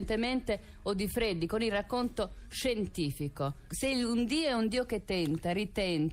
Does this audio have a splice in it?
no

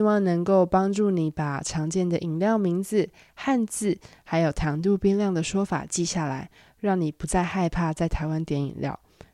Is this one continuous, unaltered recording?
yes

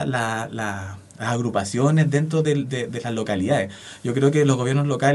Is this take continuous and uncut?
yes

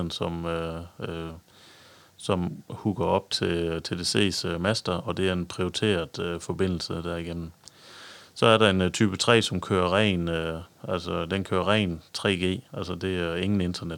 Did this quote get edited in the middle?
yes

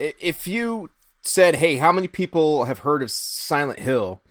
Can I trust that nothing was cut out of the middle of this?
yes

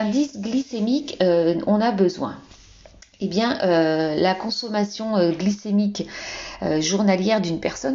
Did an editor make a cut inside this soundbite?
no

